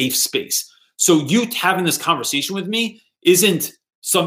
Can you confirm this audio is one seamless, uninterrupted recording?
yes; 0 cuts

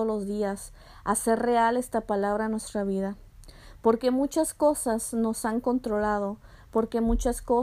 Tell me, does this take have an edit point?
no; 0 cuts

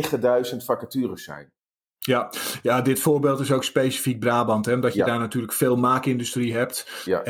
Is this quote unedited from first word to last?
yes; 0 cuts

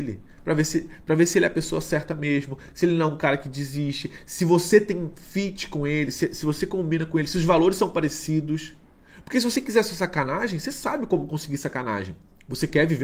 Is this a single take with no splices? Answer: yes; 0 cuts

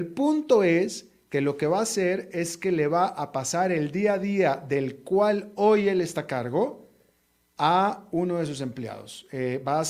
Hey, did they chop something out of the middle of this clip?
no; 0 cuts

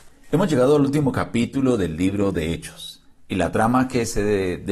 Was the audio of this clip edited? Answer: no; 0 cuts

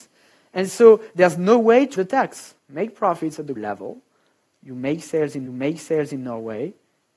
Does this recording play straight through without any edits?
no; 4 cuts; at 2.0 s, 2.6 s, 3.6 s, 5.5 s

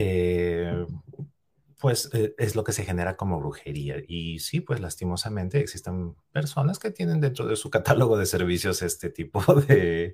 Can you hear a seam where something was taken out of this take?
no; 0 cuts

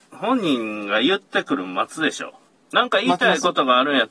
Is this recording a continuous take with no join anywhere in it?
yes; 0 cuts

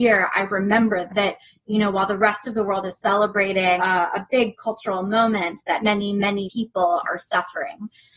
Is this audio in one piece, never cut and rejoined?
no; 4 cuts; at 1.1 s, 3.8 s, 5.8 s, 6.4 s

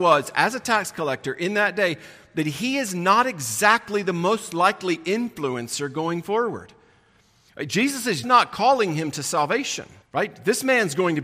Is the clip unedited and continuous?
no; 2 cuts; at 8.2 s, 10.0 s

